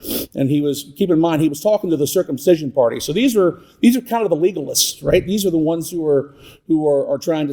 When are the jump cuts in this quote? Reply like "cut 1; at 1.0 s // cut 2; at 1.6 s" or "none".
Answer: none